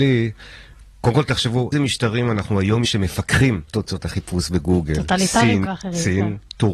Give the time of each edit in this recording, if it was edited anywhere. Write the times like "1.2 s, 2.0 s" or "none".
1.7 s, 2.8 s, 3.7 s, 5.6 s